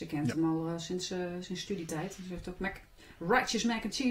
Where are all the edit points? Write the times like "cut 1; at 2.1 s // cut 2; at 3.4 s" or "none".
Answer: none